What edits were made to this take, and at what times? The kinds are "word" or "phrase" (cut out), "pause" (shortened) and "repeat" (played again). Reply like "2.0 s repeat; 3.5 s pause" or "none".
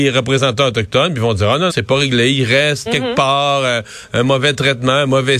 1.7 s word; 2.9 s word